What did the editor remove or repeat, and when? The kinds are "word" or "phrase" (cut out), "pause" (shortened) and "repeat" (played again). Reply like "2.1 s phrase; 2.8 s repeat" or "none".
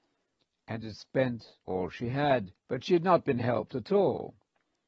1.6 s pause; 2.6 s pause